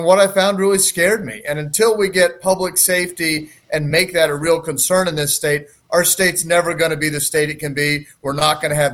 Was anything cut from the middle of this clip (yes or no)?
no